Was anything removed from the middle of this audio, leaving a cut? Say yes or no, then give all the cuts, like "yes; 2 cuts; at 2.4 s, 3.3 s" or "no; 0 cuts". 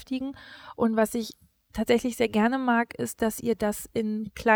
no; 0 cuts